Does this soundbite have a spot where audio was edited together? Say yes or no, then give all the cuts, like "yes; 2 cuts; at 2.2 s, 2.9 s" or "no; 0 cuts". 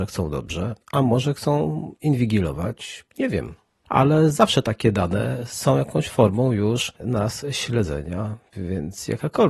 no; 0 cuts